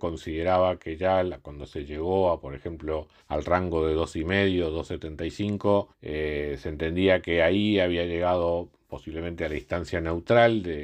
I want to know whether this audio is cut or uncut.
cut